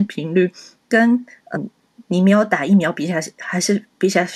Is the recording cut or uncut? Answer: cut